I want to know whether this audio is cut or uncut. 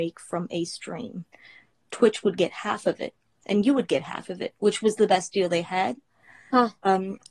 uncut